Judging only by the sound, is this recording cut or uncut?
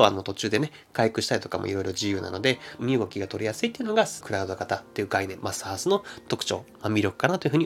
cut